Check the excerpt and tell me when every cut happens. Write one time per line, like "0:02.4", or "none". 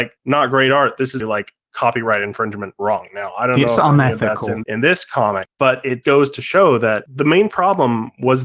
0:01.2
0:04.6
0:06.0